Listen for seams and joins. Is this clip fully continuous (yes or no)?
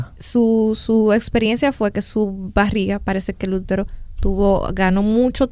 yes